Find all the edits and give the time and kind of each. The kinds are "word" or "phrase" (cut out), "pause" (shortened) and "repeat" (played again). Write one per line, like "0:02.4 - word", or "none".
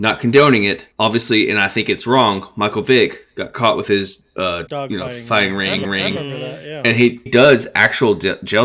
0:00.9 - pause
0:04.7 - word
0:05.8 - repeat
0:07.3 - phrase